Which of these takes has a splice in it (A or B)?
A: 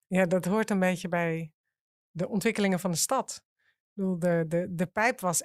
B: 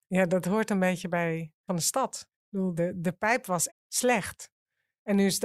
B